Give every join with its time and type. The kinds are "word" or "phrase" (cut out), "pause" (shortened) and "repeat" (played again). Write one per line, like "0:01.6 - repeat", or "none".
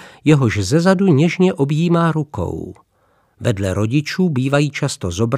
none